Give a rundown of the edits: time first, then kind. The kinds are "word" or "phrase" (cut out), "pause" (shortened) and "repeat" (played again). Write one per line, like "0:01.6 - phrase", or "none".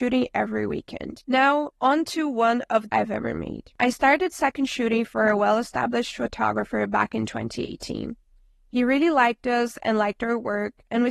0:02.9 - phrase